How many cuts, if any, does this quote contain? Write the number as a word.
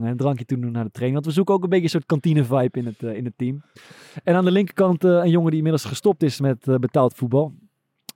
zero